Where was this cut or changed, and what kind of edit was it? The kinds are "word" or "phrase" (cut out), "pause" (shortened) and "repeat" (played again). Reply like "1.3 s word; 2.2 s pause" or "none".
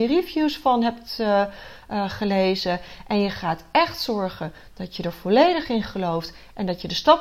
none

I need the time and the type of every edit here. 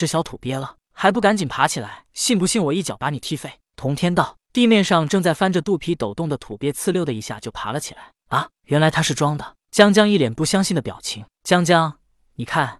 2.1 s pause

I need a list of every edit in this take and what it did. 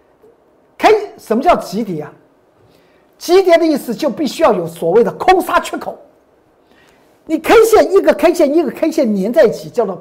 none

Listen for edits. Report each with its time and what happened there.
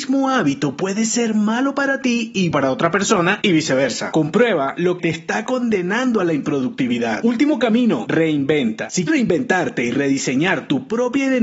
2.5 s word; 5.0 s word; 9.1 s word

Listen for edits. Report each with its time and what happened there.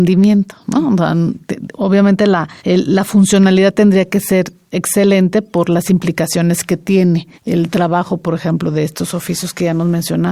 2.6 s pause; 7.3 s pause

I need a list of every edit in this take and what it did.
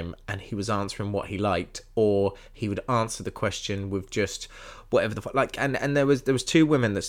none

